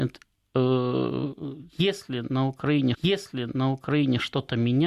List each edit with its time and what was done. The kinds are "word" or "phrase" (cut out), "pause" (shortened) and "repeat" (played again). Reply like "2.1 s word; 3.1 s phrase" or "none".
2.9 s repeat